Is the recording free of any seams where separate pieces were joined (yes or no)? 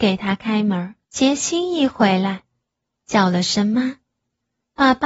no